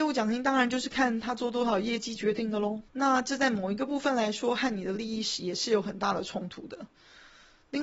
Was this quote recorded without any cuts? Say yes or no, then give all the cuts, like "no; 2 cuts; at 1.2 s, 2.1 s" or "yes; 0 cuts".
no; 1 cut; at 2.9 s